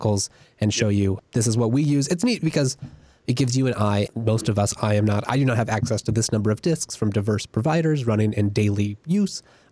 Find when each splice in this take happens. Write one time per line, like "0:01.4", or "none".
0:01.2
0:04.1